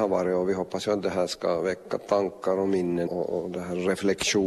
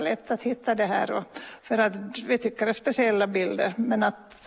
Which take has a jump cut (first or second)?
first